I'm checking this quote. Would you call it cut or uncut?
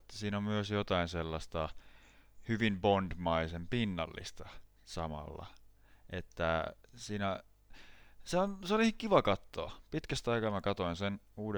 cut